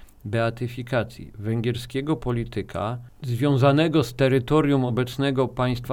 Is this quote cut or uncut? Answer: uncut